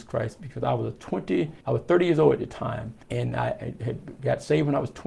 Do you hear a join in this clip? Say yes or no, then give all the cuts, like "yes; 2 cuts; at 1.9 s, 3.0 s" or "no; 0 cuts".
yes; 2 cuts; at 1.6 s, 3.0 s